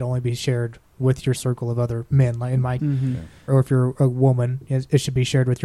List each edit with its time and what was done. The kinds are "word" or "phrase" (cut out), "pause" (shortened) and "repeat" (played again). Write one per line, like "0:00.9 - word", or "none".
0:01.4 - word
0:02.8 - word
0:03.5 - word